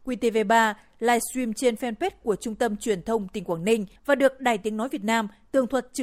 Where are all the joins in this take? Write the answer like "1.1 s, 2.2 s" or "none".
4.0 s